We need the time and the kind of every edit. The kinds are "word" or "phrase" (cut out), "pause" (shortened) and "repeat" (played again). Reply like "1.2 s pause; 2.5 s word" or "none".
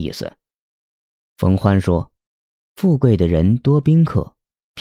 2.2 s pause